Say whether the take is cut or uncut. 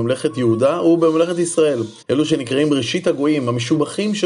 cut